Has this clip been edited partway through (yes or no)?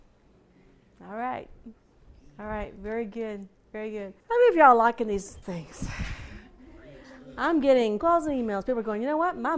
yes